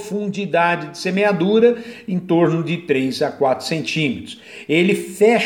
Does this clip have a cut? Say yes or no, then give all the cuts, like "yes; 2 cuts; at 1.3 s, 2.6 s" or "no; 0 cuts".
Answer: no; 0 cuts